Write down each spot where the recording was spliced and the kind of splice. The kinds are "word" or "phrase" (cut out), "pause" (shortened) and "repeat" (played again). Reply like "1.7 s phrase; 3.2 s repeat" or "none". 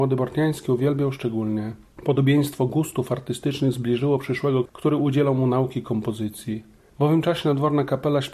4.7 s phrase